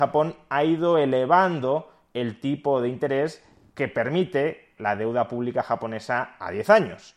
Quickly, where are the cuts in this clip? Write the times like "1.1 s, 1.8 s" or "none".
4.8 s

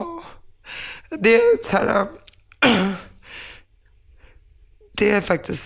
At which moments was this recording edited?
none

